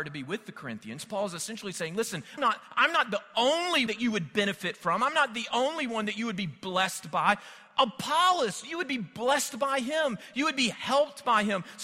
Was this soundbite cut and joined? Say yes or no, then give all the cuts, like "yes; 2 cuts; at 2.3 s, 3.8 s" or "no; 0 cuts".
yes; 2 cuts; at 2.4 s, 3.9 s